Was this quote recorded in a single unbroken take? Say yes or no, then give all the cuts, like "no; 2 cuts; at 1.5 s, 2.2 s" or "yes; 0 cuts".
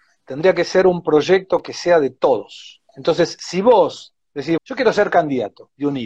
no; 2 cuts; at 2.9 s, 4.6 s